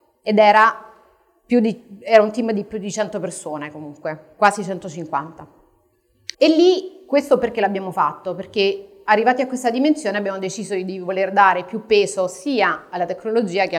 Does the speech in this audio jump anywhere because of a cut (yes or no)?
yes